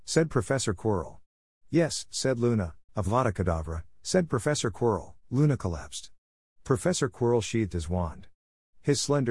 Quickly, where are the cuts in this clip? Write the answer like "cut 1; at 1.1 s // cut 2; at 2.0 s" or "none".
cut 1; at 2.9 s // cut 2; at 5.2 s

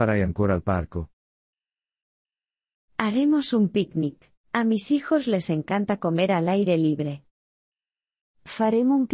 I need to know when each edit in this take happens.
cut 1; at 4.4 s

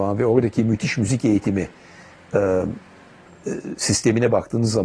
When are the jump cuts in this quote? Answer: none

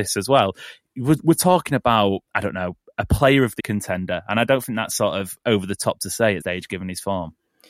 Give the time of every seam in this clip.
cut 1; at 2.2 s // cut 2; at 3.6 s // cut 3; at 6.4 s

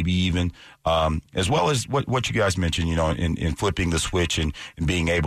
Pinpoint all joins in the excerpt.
none

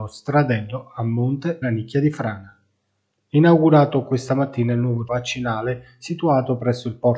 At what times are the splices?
cut 1; at 1.6 s // cut 2; at 5.1 s

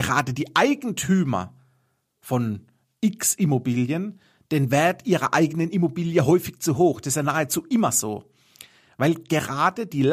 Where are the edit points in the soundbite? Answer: none

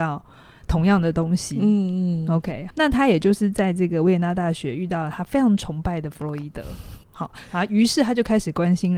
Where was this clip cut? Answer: cut 1; at 2.7 s // cut 2; at 7.0 s

